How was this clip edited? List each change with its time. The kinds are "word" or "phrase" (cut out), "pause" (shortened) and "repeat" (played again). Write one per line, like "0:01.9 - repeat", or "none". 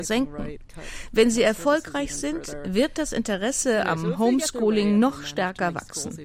none

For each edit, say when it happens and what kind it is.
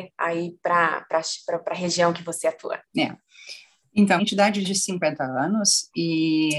0:02.9 - pause
0:04.2 - word
0:04.6 - phrase

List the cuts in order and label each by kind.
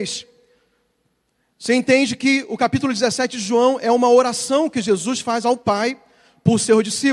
none

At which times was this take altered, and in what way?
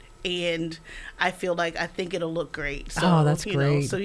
none

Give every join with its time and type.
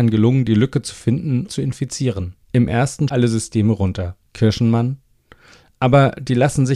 0:01.5 - phrase
0:02.4 - pause
0:03.1 - phrase
0:04.3 - pause

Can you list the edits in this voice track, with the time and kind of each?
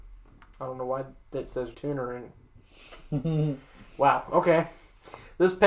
0:01.7 - word

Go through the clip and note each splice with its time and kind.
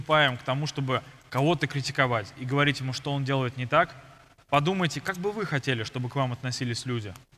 none

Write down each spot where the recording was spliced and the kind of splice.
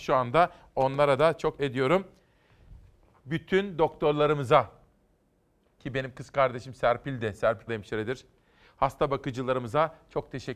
0:01.6 - word
0:05.8 - word
0:07.7 - phrase

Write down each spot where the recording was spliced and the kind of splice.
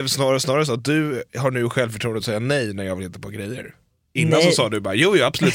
none

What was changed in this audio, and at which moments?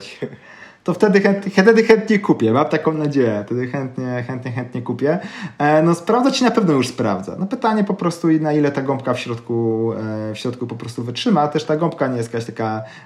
none

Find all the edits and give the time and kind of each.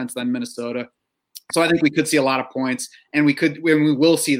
none

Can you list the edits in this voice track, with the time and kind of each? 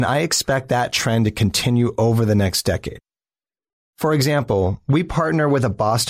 none

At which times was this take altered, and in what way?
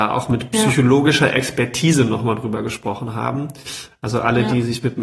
none

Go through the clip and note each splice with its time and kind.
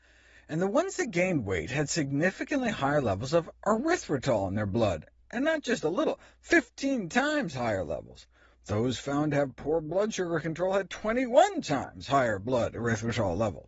none

